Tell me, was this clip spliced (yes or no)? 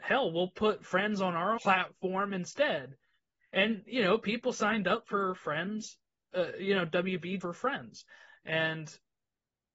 yes